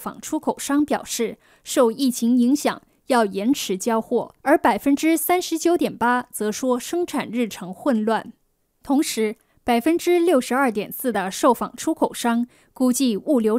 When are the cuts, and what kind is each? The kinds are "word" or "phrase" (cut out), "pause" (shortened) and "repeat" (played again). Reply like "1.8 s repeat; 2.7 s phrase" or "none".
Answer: 4.4 s pause; 8.6 s pause